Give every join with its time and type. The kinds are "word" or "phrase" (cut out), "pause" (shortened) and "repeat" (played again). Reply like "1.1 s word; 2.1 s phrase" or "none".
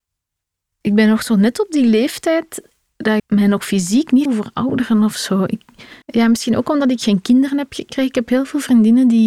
3.2 s word; 4.3 s word; 6.0 s pause